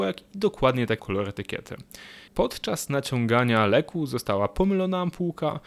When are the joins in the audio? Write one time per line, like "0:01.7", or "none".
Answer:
0:01.0
0:02.3